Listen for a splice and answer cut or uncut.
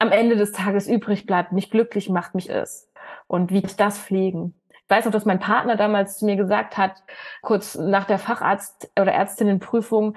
cut